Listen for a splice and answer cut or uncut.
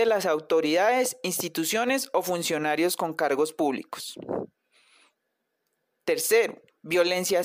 uncut